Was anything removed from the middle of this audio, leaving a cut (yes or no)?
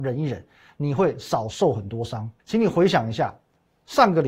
yes